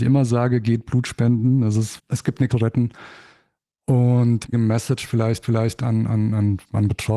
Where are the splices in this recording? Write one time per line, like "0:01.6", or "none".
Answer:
0:02.0
0:02.5
0:04.5
0:05.4